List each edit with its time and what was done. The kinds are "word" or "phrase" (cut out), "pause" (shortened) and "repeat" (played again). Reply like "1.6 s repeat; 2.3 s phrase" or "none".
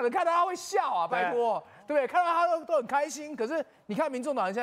none